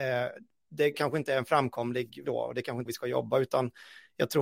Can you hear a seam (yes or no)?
yes